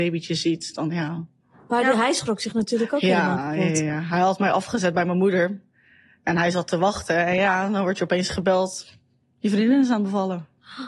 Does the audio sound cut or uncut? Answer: uncut